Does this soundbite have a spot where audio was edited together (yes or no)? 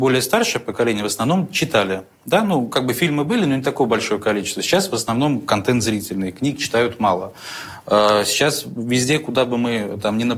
no